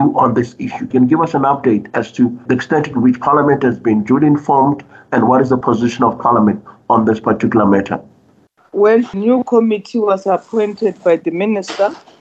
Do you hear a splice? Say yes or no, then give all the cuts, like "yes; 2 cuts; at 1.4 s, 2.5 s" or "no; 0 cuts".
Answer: no; 0 cuts